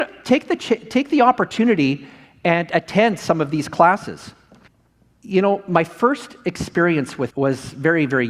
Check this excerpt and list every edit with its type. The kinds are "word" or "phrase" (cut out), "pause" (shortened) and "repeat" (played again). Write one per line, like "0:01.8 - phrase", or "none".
0:07.3 - word